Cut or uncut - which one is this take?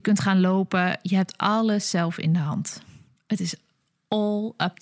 uncut